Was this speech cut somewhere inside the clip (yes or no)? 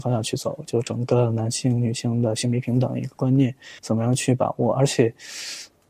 yes